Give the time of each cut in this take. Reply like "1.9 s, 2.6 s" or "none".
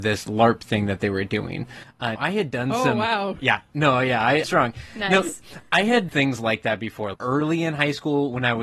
2.2 s, 4.4 s, 6.1 s, 7.1 s